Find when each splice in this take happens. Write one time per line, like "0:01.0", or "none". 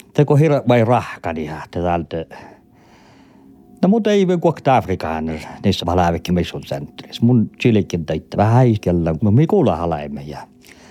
0:05.8
0:06.3
0:08.3
0:08.8
0:09.2